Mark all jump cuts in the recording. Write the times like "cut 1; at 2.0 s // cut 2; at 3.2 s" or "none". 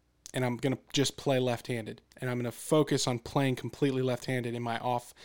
cut 1; at 2.0 s